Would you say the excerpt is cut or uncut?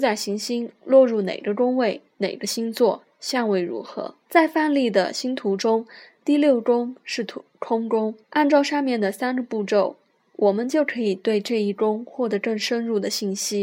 cut